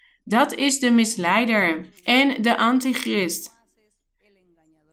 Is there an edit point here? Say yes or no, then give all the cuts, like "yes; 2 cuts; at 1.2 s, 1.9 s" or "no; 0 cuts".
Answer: yes; 1 cut; at 2.0 s